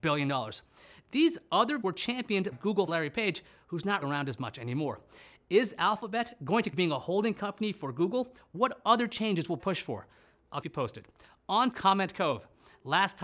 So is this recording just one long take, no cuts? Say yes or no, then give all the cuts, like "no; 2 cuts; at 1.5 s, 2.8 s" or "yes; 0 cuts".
no; 8 cuts; at 1.8 s, 2.5 s, 2.9 s, 4.0 s, 6.7 s, 9.6 s, 10.6 s, 11.7 s